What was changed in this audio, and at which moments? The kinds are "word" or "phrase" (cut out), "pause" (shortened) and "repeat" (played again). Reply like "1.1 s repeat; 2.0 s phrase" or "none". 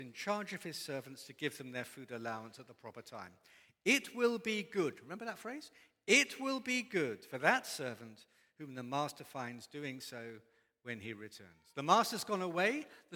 none